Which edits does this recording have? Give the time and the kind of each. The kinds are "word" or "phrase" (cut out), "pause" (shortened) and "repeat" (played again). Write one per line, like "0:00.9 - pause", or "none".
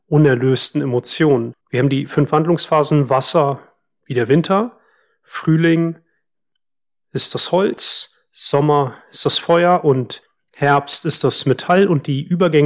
0:01.6 - pause